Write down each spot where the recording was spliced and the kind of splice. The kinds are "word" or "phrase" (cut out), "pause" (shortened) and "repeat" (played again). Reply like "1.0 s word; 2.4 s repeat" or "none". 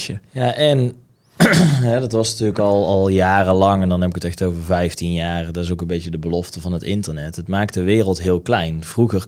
none